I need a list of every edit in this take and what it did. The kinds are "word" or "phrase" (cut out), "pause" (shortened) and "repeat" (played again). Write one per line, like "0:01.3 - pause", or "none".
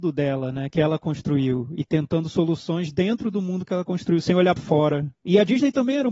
0:04.6 - word